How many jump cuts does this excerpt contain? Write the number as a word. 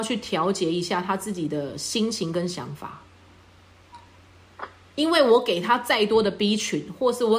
zero